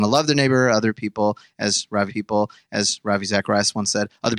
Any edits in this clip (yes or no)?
yes